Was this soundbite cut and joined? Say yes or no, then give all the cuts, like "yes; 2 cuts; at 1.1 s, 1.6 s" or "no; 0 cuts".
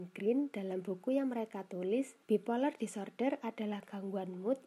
yes; 1 cut; at 2.2 s